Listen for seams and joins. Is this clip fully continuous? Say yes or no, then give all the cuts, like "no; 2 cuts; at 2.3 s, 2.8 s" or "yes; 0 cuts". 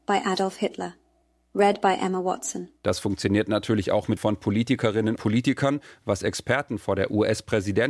no; 3 cuts; at 2.8 s, 4.2 s, 5.2 s